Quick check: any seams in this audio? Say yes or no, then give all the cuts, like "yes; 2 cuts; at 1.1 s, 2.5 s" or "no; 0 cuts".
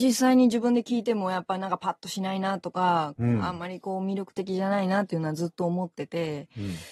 no; 0 cuts